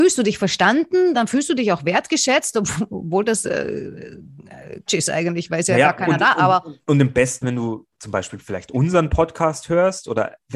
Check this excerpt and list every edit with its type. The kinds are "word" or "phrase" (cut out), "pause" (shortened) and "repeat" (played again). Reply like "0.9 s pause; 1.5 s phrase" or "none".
1.1 s word; 4.9 s word; 6.8 s pause; 7.4 s word; 7.9 s pause